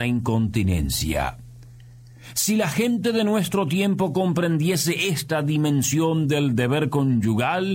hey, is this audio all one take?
yes; 0 cuts

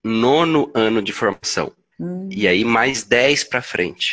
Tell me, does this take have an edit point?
yes; 1 cut; at 1.9 s

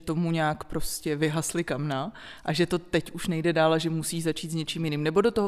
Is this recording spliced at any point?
no; 0 cuts

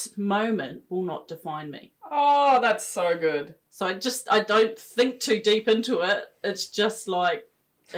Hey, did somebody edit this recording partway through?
yes; 1 cut; at 2.0 s

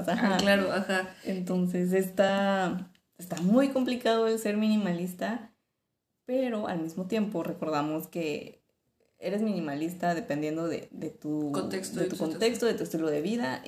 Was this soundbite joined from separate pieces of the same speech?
no; 0 cuts

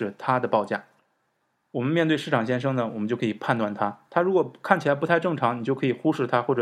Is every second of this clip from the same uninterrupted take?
yes; 0 cuts

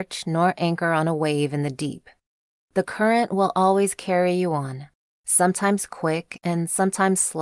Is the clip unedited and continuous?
yes; 0 cuts

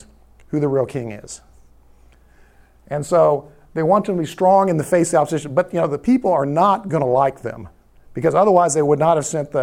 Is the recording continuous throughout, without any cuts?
yes; 0 cuts

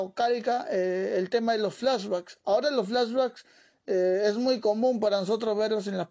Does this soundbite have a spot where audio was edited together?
no; 0 cuts

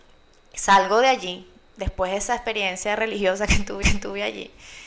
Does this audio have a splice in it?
yes; 1 cut; at 3.8 s

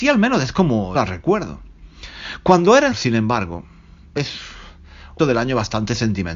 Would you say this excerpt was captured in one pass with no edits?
no; 4 cuts; at 0.9 s, 2.9 s, 4.2 s, 5.2 s

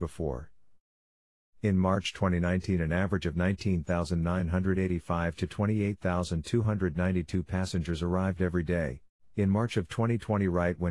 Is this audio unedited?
yes; 0 cuts

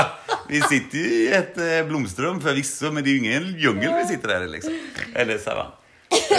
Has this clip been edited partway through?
no; 0 cuts

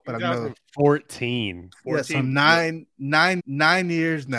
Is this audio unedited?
no; 1 cut; at 3.4 s

